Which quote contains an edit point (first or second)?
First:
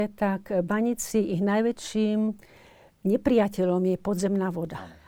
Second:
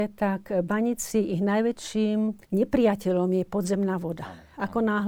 second